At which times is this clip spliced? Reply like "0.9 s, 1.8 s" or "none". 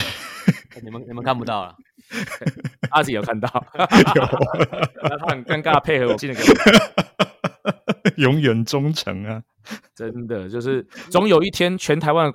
6.2 s